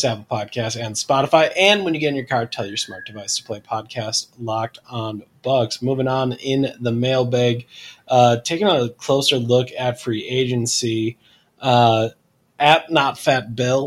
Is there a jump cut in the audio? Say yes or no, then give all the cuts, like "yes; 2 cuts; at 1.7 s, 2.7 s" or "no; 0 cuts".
no; 0 cuts